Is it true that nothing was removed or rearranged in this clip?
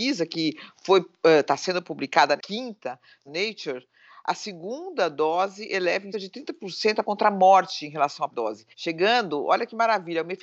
no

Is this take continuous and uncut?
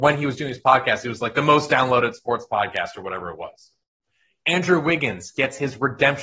yes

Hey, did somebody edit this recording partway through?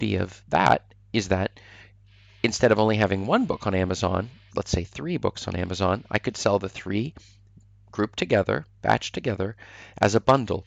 yes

